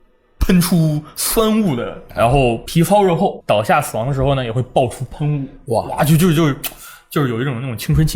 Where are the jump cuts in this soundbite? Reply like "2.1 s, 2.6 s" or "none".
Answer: 2.1 s, 3.4 s